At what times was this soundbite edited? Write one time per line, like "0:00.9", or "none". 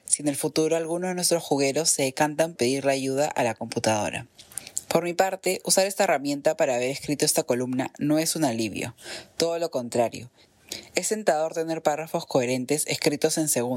0:02.6